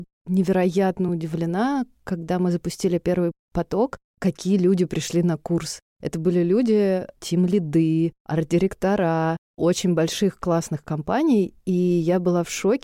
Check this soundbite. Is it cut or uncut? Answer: uncut